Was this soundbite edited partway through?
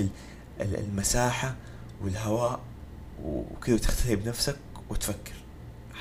no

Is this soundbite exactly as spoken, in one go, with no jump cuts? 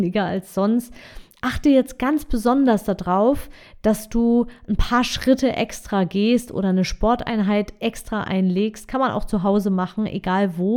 yes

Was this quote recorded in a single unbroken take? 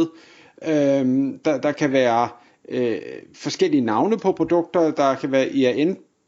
yes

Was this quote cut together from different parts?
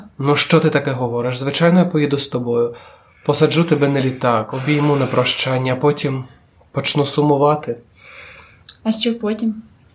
no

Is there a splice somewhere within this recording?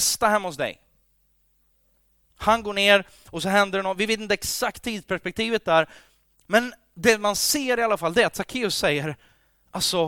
no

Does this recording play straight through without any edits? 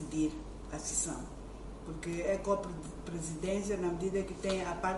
yes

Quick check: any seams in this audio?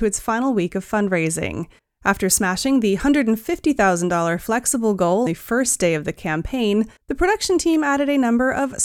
yes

